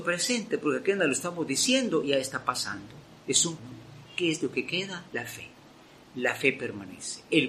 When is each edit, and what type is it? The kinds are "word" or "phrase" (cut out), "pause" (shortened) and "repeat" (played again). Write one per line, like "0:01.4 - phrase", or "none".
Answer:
0:03.1 - pause
0:03.6 - phrase
0:05.1 - pause